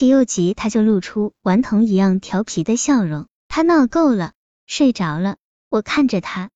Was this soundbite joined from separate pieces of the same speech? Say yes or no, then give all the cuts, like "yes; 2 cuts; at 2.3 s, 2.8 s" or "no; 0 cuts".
no; 0 cuts